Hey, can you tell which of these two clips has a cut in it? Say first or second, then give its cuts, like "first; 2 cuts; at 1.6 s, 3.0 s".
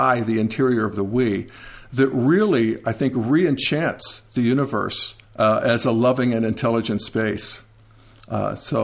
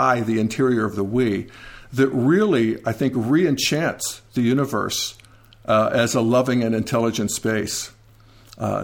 first; 1 cut; at 5.2 s